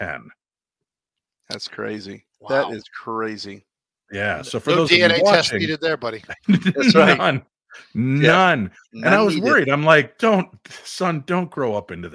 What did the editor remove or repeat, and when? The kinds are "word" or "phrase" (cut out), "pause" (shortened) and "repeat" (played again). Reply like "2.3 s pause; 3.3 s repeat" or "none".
none